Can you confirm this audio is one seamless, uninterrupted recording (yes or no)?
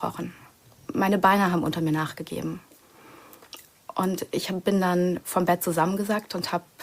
yes